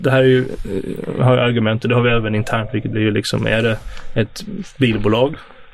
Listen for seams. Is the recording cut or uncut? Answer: cut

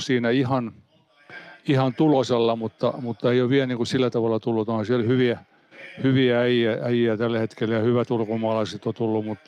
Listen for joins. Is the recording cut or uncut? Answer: uncut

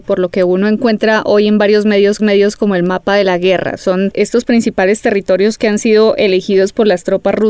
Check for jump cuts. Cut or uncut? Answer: cut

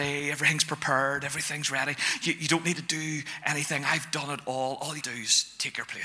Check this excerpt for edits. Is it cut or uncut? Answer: cut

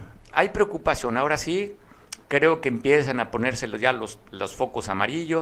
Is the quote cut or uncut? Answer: cut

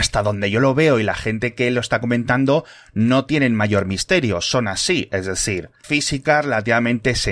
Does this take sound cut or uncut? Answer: cut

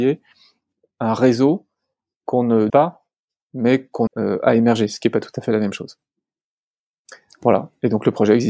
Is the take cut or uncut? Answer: cut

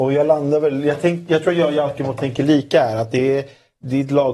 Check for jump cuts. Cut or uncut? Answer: uncut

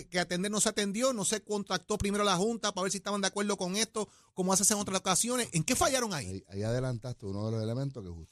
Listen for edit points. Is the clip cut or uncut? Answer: uncut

